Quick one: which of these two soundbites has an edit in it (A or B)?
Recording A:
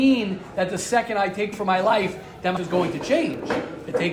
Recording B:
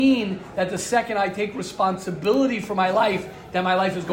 A